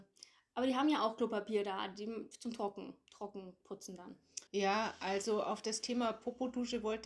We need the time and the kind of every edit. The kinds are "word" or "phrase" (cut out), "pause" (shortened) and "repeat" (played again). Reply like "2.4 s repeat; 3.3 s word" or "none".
4.5 s pause